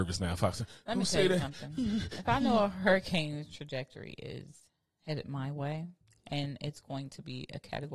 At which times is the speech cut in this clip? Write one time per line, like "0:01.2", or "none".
none